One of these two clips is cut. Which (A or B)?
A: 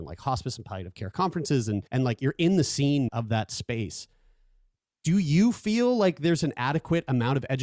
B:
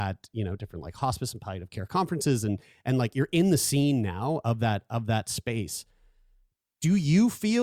A